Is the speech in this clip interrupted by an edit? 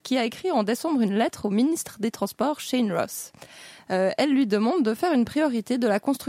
no; 0 cuts

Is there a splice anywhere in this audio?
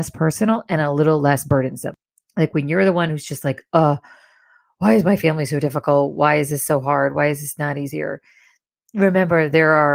no; 0 cuts

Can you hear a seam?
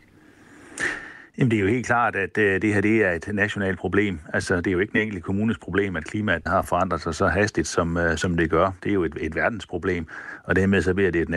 yes; 1 cut; at 6.5 s

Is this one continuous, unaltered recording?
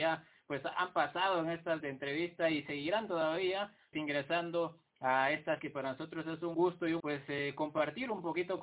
no; 5 cuts; at 1.8 s, 3.9 s, 5.6 s, 6.5 s, 7.0 s

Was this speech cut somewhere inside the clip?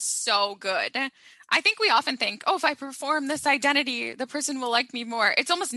no; 0 cuts

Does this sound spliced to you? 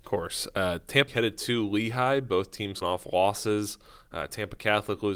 yes; 2 cuts; at 1.1 s, 2.8 s

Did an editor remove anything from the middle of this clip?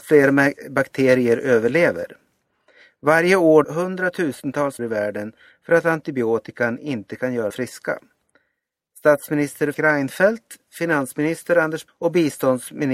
yes; 5 cuts; at 3.6 s, 4.8 s, 7.5 s, 9.7 s, 11.9 s

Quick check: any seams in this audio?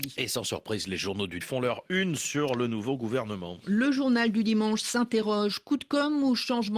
yes; 1 cut; at 1.4 s

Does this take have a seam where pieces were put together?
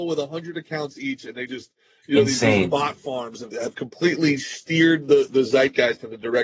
no; 0 cuts

